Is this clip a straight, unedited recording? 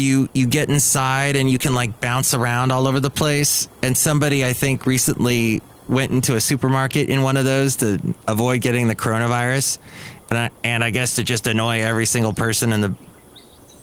no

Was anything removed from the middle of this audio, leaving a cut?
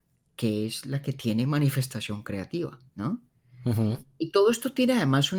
yes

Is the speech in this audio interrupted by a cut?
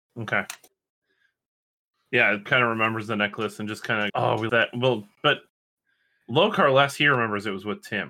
yes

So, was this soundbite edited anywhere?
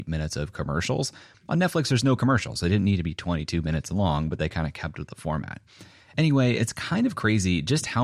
no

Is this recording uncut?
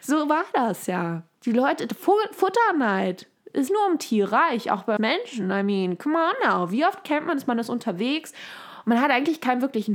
no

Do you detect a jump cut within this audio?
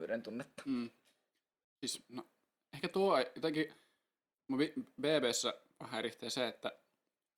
no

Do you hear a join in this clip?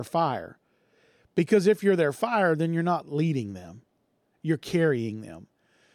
no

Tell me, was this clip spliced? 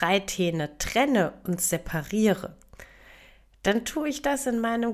no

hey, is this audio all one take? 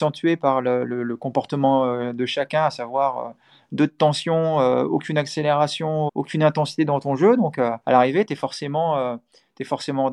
no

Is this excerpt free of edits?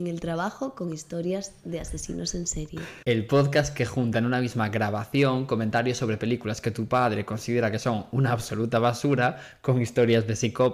no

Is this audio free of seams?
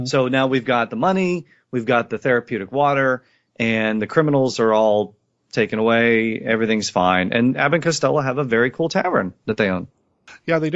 yes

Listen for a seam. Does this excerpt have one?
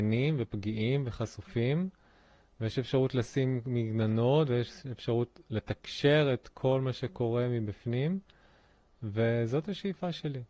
no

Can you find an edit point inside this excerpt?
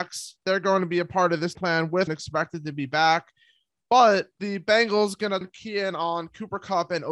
yes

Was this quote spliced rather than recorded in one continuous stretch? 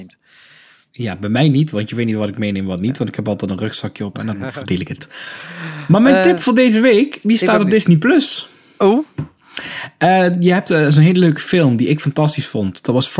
no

